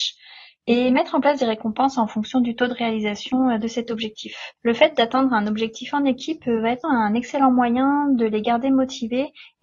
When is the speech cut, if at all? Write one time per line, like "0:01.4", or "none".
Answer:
0:04.6
0:06.8